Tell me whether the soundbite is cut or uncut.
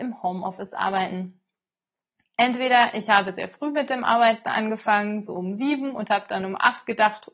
uncut